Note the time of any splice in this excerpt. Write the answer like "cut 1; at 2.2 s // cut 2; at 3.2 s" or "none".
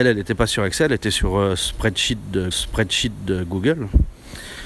cut 1; at 2.5 s